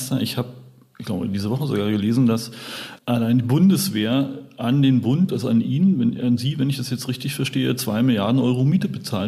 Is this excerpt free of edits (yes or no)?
no